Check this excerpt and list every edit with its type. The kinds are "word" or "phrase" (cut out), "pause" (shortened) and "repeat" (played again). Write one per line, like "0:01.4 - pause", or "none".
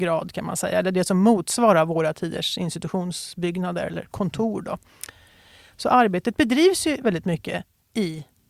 none